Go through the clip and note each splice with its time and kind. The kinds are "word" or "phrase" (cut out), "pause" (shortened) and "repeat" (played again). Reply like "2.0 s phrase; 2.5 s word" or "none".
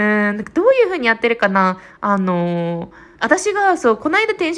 3.2 s pause